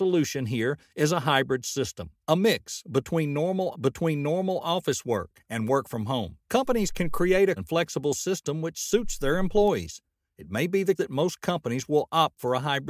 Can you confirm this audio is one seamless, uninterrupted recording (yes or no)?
no